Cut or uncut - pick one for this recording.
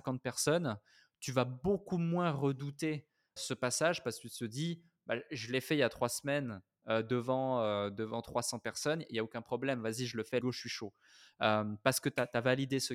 cut